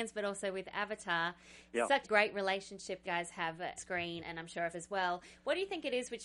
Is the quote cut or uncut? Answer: cut